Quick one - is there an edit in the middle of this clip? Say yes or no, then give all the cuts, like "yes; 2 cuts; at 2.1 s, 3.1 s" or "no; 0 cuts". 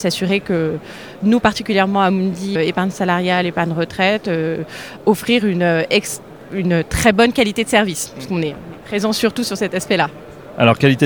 yes; 1 cut; at 2.5 s